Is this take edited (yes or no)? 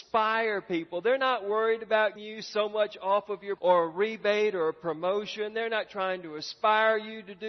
yes